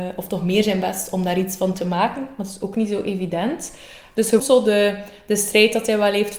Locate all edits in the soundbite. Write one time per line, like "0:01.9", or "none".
0:04.4